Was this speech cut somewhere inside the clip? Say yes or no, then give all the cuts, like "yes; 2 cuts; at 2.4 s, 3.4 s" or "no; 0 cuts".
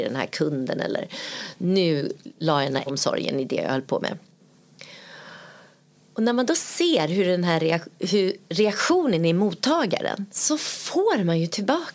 yes; 2 cuts; at 2.9 s, 10.3 s